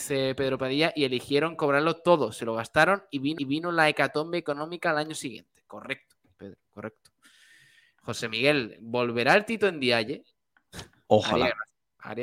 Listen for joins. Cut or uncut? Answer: cut